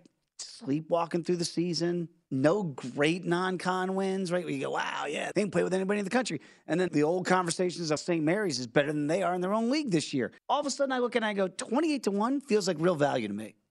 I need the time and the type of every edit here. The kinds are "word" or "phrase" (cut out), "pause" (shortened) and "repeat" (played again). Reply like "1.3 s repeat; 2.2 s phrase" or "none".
5.3 s word; 6.9 s word; 8.0 s word; 10.4 s pause